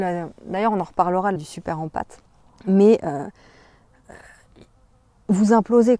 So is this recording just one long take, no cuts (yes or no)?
no